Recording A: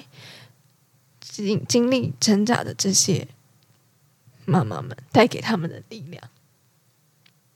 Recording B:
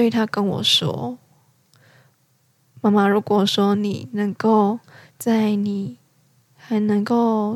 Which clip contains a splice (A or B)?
A